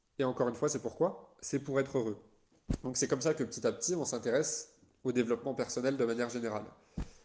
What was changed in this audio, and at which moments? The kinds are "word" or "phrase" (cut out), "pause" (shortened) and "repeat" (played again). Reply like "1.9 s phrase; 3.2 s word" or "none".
none